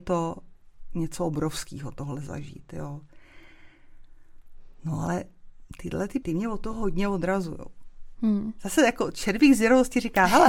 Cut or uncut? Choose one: cut